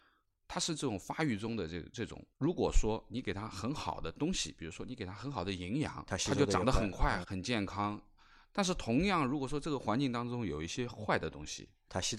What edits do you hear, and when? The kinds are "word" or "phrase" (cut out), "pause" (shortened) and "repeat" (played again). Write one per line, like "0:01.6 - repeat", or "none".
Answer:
0:02.3 - pause
0:07.2 - phrase